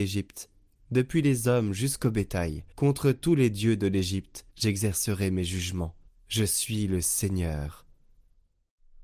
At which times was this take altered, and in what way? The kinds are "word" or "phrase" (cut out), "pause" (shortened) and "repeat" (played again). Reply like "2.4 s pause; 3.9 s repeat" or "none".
2.7 s pause; 4.5 s pause; 6.1 s pause